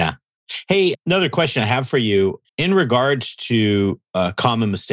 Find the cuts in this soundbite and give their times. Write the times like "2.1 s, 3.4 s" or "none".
2.5 s